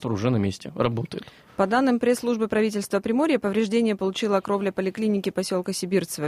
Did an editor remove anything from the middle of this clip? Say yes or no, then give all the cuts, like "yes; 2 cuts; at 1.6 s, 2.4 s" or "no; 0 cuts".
no; 0 cuts